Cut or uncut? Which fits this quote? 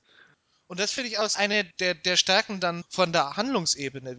cut